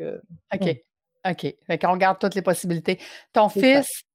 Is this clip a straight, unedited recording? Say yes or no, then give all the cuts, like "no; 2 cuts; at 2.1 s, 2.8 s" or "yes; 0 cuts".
yes; 0 cuts